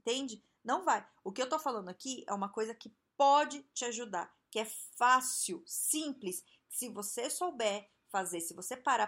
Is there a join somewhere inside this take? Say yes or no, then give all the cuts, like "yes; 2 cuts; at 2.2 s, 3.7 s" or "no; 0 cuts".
no; 0 cuts